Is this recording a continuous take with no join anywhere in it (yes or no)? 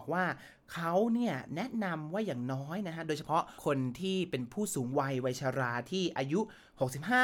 no